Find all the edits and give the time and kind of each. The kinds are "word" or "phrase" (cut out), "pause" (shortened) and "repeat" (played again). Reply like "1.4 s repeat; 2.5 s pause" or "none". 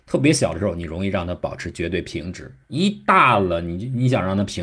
2.6 s pause